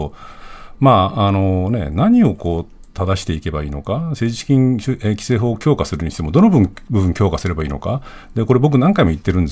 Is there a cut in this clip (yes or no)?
no